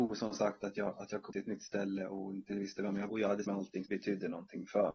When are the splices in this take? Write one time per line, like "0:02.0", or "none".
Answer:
0:01.3
0:02.5
0:03.1
0:03.4
0:03.8